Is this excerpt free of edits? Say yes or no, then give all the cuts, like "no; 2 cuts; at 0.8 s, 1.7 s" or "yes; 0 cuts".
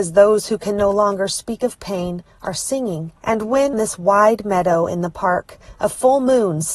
no; 2 cuts; at 3.2 s, 3.7 s